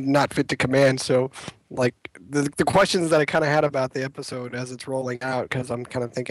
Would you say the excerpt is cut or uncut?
uncut